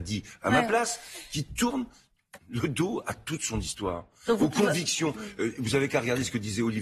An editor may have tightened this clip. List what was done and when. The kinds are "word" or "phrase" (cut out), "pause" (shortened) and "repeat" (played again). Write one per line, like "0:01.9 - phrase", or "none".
0:02.4 - pause